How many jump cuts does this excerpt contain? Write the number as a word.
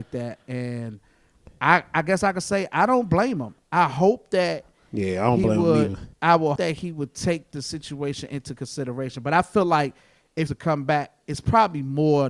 three